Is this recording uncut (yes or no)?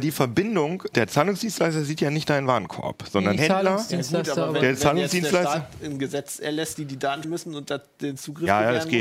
no